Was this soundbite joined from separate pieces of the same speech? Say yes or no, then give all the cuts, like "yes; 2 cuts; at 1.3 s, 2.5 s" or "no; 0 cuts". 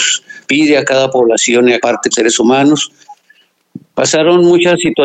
yes; 2 cuts; at 1.8 s, 2.1 s